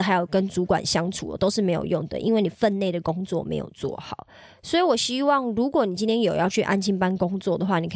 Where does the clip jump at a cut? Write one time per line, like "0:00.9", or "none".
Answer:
none